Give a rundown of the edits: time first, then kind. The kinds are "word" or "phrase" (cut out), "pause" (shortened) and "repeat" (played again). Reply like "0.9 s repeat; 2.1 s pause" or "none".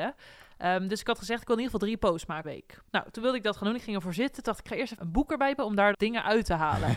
2.4 s phrase; 2.9 s pause; 5.0 s word; 5.6 s word; 5.9 s word